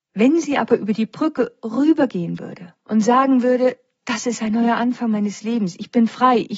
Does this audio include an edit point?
yes; 1 cut; at 2.8 s

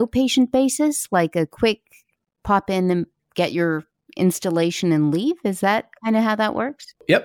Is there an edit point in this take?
no; 0 cuts

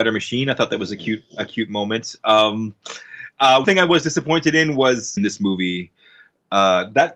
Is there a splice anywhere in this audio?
yes; 2 cuts; at 3.6 s, 5.2 s

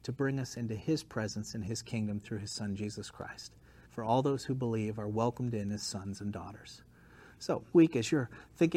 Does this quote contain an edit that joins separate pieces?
yes; 2 cuts; at 3.9 s, 7.7 s

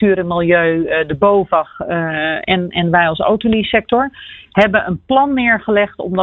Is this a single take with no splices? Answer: yes; 0 cuts

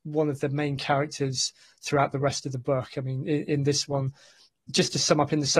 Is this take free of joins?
yes; 0 cuts

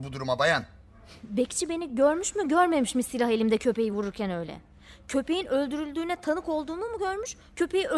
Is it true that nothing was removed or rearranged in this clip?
yes; 0 cuts

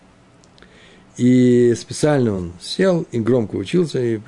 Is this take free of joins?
yes; 0 cuts

